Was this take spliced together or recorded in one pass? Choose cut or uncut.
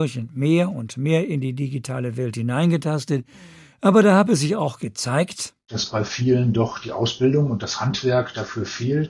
uncut